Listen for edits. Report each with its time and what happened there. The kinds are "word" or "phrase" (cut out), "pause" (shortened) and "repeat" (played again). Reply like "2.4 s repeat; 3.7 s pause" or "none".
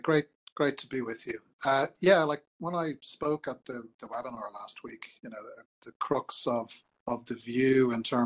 5.7 s pause

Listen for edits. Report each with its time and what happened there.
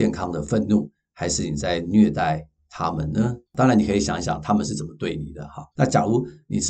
3.5 s pause; 5.7 s pause

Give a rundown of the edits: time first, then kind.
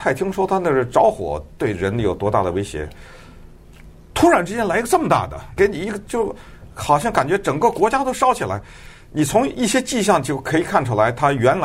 5.6 s word

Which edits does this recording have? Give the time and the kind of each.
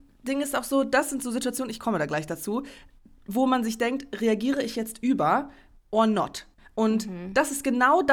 none

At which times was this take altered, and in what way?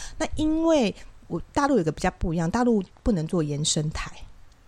1.2 s word

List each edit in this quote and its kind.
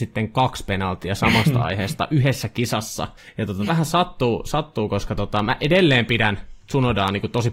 3.2 s pause; 3.7 s word

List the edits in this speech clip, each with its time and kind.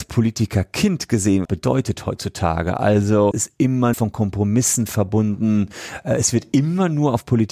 1.4 s phrase; 3.3 s word; 3.9 s phrase

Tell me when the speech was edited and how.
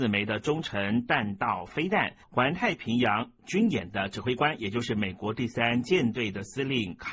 2.2 s pause

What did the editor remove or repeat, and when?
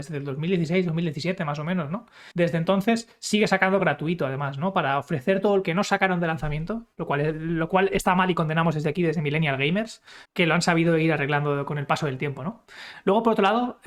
2.3 s pause; 3.8 s word; 5.6 s word; 10.2 s word

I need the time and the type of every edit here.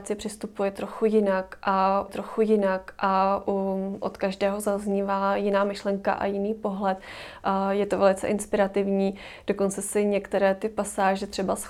2.1 s repeat

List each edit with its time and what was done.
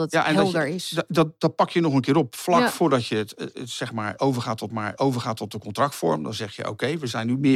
4.7 s repeat

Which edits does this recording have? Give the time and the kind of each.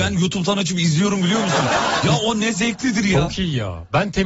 none

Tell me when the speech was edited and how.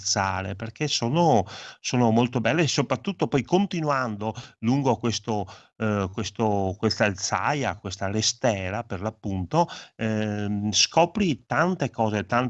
none

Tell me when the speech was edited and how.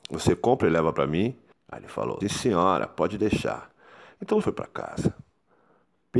1.5 s pause; 2.2 s word; 4.4 s word

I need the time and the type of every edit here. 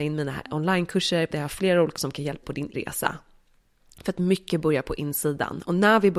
1.3 s word; 2.0 s word; 2.4 s word; 2.7 s word

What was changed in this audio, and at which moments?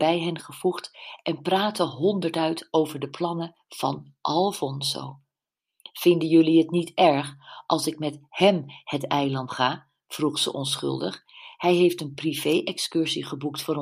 9.5 s word

